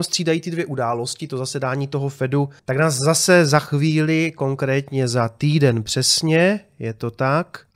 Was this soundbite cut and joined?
yes; 1 cut; at 2.6 s

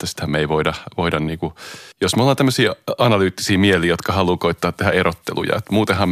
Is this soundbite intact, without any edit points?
no; 1 cut; at 1.9 s

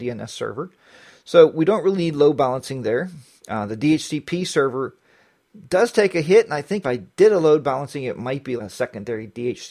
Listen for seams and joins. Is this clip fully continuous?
no; 2 cuts; at 6.8 s, 8.6 s

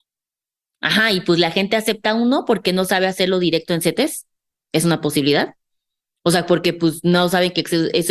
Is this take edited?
no; 0 cuts

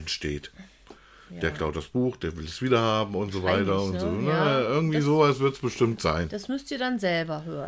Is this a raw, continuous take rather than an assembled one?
yes; 0 cuts

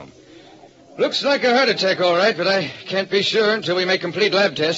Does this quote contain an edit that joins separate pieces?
no; 0 cuts

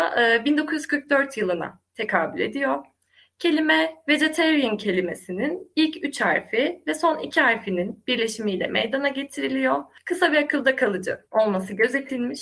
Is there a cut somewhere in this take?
no; 0 cuts

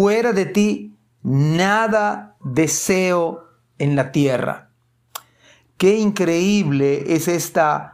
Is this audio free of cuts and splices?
yes; 0 cuts

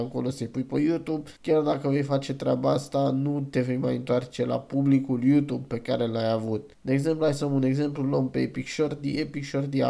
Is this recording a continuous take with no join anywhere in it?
no; 2 cuts; at 1.4 s, 6.7 s

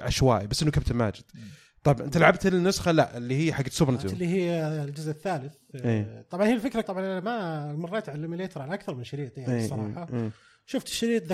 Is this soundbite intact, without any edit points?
no; 2 cuts; at 4.0 s, 6.8 s

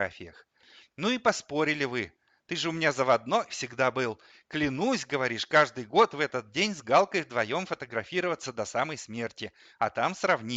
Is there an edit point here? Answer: no; 0 cuts

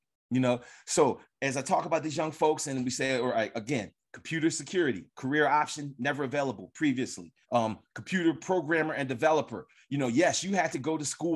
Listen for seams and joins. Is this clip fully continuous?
no; 1 cut; at 7.4 s

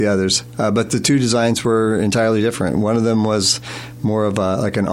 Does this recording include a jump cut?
no; 0 cuts

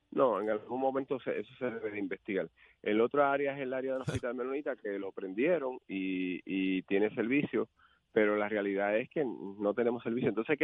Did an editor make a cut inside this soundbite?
no; 0 cuts

